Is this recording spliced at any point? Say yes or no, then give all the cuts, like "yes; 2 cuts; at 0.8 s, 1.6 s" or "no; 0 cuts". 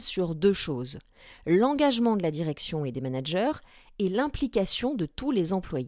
no; 0 cuts